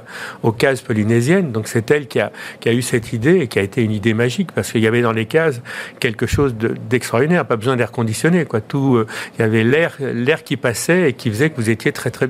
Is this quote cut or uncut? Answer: uncut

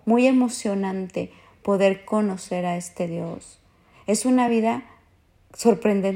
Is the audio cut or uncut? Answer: uncut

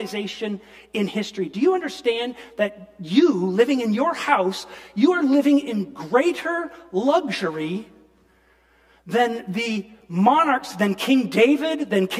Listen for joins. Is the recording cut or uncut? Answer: uncut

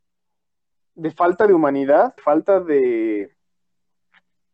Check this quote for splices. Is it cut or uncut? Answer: cut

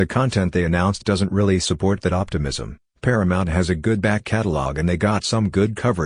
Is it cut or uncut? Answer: uncut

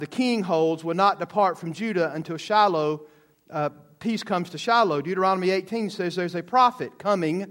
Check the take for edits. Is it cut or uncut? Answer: uncut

